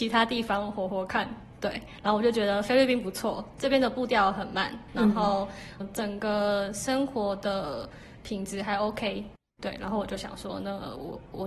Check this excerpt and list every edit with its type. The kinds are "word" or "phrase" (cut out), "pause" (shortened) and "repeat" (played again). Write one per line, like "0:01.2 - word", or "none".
0:05.8 - word
0:09.5 - pause